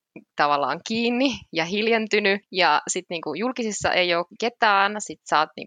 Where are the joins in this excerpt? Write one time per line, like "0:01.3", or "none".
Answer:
0:04.4